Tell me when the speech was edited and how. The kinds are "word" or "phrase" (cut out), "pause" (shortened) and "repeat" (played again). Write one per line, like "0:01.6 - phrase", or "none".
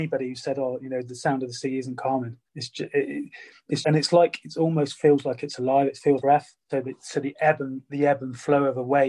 0:02.5 - pause
0:03.8 - word
0:06.2 - word
0:06.6 - pause